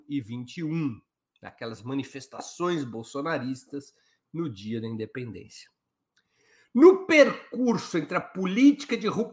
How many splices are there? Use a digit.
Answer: 0